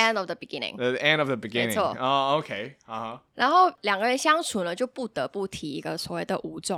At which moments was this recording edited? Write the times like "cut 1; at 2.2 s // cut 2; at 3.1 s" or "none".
none